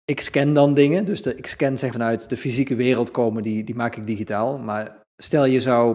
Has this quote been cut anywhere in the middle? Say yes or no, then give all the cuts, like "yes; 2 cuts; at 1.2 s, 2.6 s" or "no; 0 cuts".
yes; 1 cut; at 1.9 s